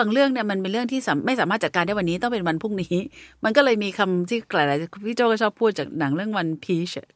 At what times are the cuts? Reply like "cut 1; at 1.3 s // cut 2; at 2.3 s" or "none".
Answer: none